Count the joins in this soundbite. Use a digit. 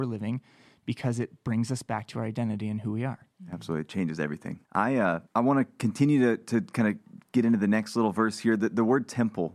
2